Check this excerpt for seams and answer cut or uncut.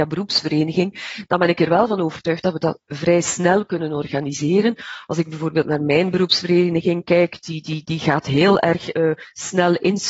uncut